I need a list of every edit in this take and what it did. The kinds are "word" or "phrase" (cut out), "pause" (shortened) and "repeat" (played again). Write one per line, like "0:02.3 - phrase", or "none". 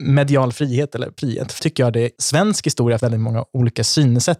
0:01.2 - word
0:01.6 - word
0:02.2 - word
0:03.0 - word